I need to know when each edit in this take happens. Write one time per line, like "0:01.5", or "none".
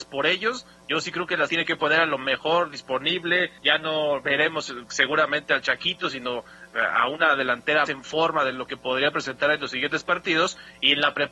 0:01.5
0:03.6
0:07.9